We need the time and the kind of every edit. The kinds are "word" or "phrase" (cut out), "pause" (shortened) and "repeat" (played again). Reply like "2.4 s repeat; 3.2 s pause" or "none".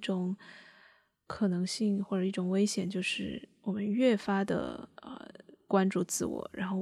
5.0 s pause